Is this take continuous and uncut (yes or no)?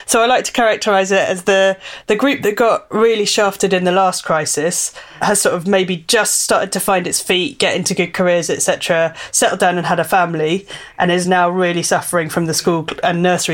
yes